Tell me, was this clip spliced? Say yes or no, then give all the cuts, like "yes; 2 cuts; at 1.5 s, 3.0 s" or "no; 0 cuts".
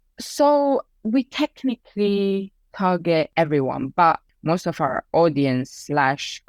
no; 0 cuts